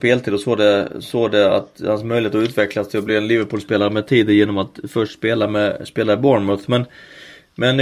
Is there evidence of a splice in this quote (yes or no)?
no